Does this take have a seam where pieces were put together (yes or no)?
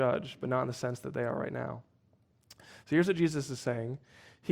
no